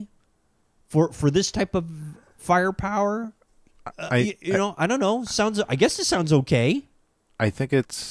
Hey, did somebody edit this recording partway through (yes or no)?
no